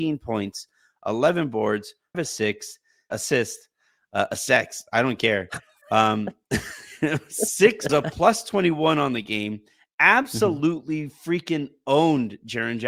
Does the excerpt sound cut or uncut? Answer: cut